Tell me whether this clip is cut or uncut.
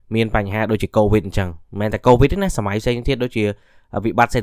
uncut